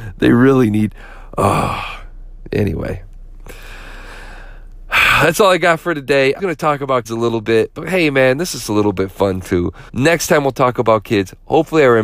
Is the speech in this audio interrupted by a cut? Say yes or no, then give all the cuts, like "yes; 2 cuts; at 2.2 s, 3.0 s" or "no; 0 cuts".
yes; 3 cuts; at 6.4 s, 7.0 s, 9.9 s